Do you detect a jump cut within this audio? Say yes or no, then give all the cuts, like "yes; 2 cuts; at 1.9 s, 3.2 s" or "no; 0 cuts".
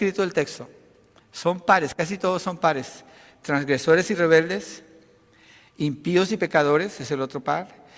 no; 0 cuts